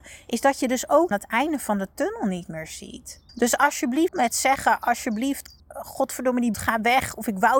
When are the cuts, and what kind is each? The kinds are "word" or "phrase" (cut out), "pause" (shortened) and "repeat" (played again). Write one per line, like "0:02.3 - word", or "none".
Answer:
0:01.1 - phrase
0:03.3 - pause
0:04.1 - word
0:05.6 - pause
0:06.5 - word